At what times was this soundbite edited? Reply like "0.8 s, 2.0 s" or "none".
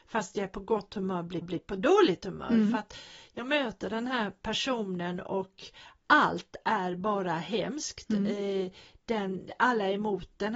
1.4 s

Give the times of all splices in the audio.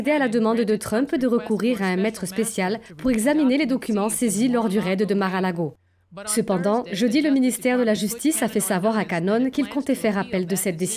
none

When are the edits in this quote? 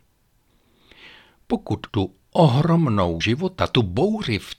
1.9 s, 3.2 s

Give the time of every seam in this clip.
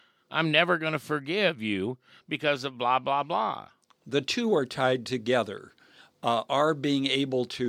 none

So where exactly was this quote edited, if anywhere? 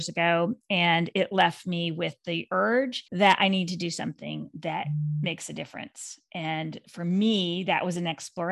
3.1 s

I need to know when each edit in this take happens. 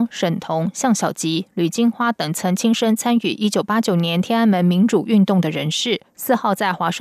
none

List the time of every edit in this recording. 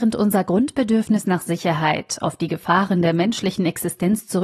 none

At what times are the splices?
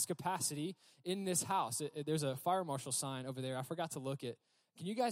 none

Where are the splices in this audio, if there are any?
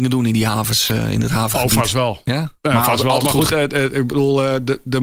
3.5 s

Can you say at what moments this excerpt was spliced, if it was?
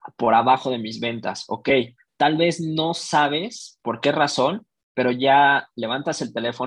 none

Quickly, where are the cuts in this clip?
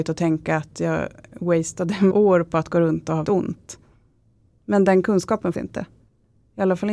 2.1 s, 3.2 s, 5.5 s

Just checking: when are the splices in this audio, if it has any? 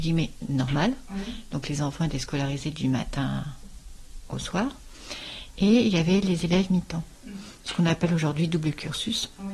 none

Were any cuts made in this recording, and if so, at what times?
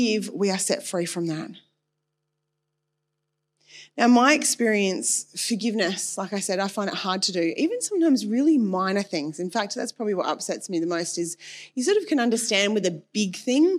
none

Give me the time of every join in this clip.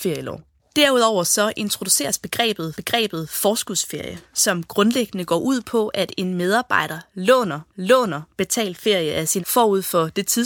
2.7 s, 7.7 s, 9.4 s

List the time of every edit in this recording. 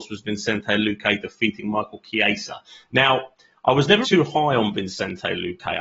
4.0 s

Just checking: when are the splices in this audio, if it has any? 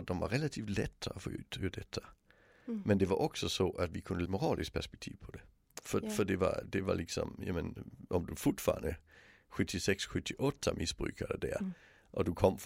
4.3 s, 6.6 s

